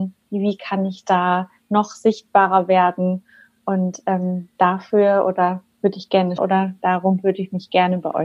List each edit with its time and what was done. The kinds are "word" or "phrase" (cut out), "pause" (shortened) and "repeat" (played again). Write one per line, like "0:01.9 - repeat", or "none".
0:06.4 - word